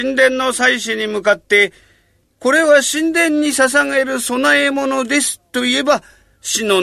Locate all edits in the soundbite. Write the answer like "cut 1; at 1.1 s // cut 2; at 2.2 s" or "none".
none

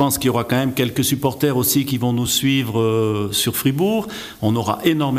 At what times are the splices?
none

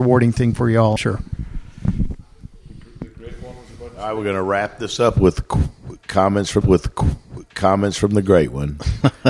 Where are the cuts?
cut 1; at 1.0 s // cut 2; at 6.6 s

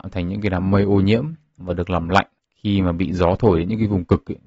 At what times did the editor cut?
cut 1; at 2.4 s

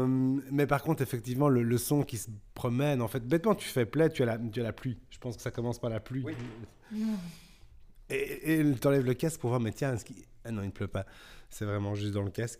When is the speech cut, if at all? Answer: cut 1; at 2.5 s

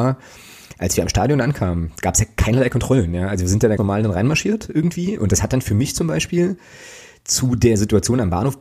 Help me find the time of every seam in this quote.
cut 1; at 3.8 s

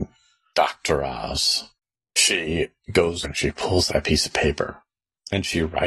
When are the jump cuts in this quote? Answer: cut 1; at 3.2 s // cut 2; at 3.9 s

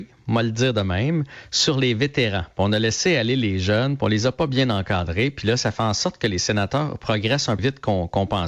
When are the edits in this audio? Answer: cut 1; at 7.6 s

